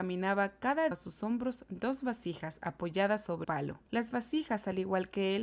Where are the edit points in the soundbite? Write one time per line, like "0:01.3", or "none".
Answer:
0:00.9
0:03.4
0:03.9